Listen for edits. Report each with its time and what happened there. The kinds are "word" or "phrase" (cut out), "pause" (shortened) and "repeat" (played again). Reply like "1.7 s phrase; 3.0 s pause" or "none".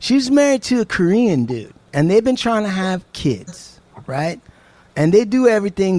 none